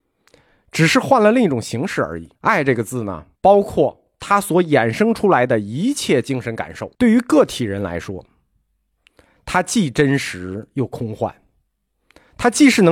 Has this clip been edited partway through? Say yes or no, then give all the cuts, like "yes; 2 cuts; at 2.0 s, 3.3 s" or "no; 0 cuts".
yes; 3 cuts; at 2.4 s, 3.4 s, 6.9 s